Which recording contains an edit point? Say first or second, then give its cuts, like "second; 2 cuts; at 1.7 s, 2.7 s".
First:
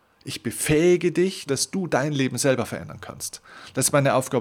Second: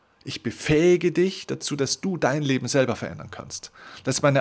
first; 1 cut; at 1.5 s